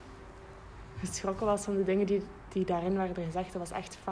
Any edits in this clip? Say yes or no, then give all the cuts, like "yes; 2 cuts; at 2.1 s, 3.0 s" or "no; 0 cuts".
no; 0 cuts